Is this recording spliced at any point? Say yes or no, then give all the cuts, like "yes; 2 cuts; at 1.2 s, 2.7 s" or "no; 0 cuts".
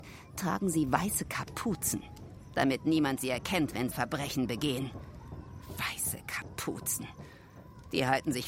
yes; 1 cut; at 3.9 s